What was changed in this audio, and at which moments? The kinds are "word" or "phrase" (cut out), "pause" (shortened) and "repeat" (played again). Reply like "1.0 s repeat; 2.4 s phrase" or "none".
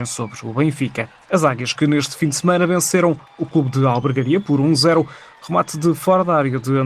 none